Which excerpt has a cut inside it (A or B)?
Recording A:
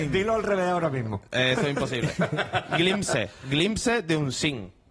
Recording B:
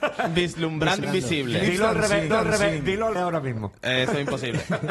B